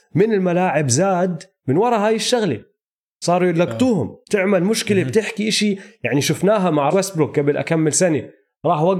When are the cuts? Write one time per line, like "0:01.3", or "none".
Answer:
0:04.2
0:06.9